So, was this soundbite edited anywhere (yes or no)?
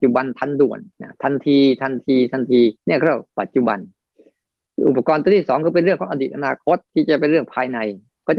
yes